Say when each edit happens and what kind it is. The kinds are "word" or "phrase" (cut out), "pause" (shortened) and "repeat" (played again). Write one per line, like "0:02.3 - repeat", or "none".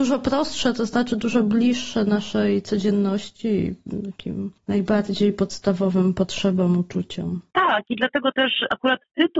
0:04.6 - pause